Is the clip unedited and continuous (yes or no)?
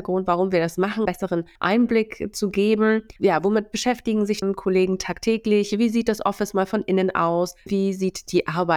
no